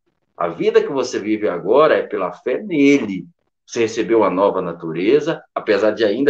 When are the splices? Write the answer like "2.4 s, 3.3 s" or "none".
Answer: none

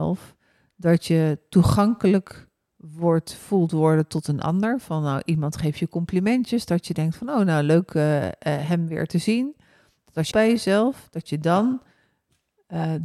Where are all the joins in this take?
10.3 s

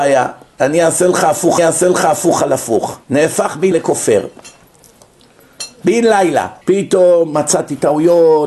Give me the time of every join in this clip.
1.6 s, 3.0 s, 3.7 s, 6.6 s

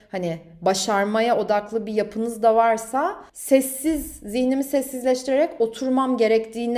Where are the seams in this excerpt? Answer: 3.3 s

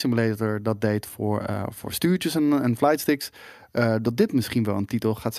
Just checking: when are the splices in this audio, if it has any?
none

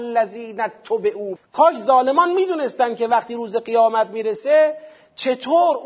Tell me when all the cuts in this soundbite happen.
1.4 s

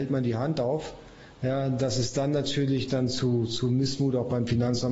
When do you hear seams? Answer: none

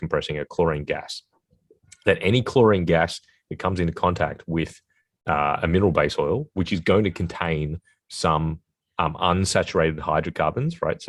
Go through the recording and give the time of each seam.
none

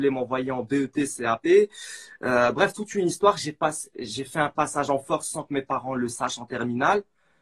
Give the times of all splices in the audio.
none

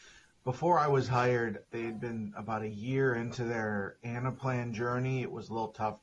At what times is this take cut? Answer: none

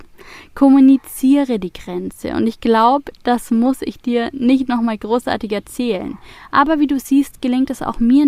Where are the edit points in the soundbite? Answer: none

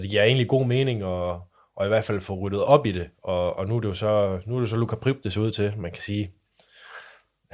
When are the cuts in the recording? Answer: none

